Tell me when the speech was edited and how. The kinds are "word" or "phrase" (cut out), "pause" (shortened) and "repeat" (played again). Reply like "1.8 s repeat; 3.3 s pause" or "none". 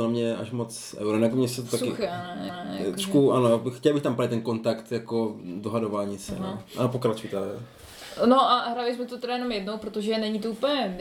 2.5 s repeat